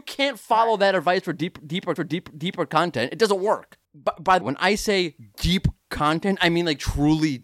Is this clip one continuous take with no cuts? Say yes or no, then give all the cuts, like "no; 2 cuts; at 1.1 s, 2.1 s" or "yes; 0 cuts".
no; 3 cuts; at 2.0 s, 3.8 s, 4.4 s